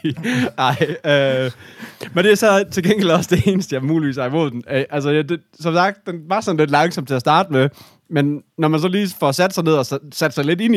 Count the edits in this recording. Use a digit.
0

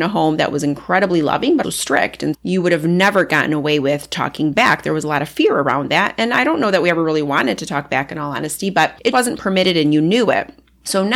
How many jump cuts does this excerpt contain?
3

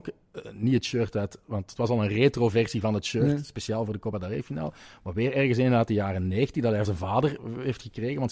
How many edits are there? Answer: 1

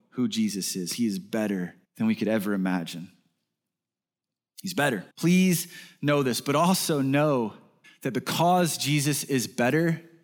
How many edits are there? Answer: 3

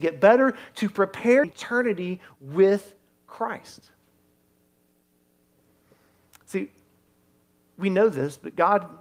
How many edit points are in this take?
1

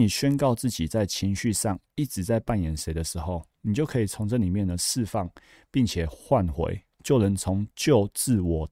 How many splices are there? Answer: 0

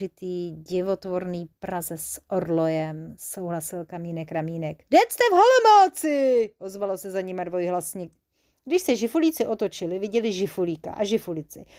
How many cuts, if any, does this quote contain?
1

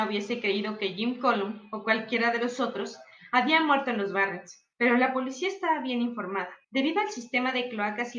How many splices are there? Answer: 2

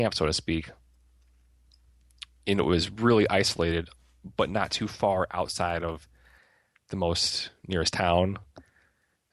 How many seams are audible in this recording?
0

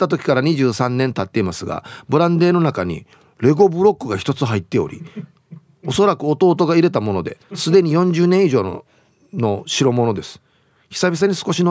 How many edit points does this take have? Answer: 1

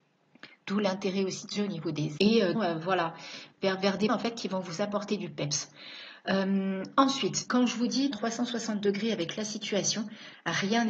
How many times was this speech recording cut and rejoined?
6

